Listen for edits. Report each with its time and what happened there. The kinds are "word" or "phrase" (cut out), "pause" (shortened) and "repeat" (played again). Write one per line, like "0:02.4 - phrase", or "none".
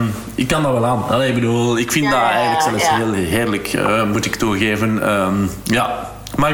none